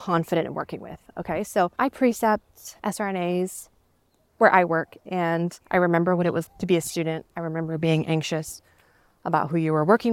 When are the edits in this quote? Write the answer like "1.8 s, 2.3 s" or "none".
2.8 s, 6.5 s